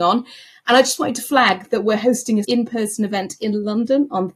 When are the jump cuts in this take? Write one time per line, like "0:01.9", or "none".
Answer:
0:02.4